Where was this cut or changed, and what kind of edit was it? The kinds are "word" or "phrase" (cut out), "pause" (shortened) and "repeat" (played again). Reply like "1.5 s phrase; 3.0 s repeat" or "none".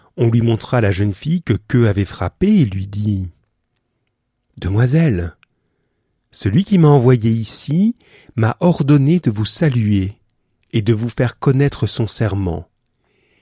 none